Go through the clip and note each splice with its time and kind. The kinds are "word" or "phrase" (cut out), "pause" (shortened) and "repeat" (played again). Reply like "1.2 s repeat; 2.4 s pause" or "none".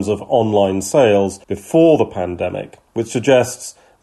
1.4 s pause; 2.9 s pause